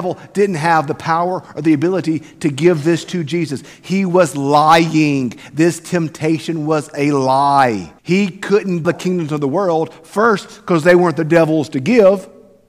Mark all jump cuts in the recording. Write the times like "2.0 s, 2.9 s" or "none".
8.0 s, 8.8 s